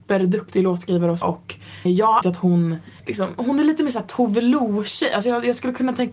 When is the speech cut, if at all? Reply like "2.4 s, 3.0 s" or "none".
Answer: 1.2 s, 1.9 s, 2.2 s, 3.0 s

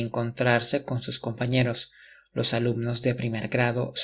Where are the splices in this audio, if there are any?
none

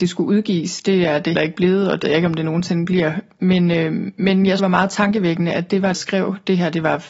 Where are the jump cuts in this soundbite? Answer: 1.3 s, 2.0 s, 4.6 s, 5.9 s

